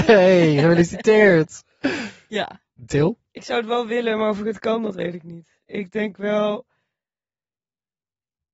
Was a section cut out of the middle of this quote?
no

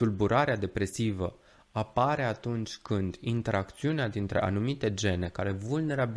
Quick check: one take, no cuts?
yes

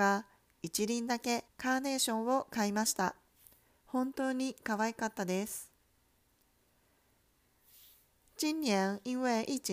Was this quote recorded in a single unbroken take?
no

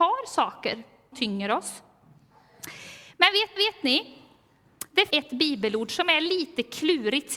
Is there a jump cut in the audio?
yes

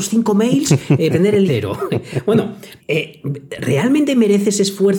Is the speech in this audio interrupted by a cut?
yes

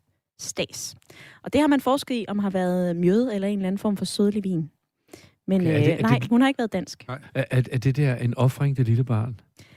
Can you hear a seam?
no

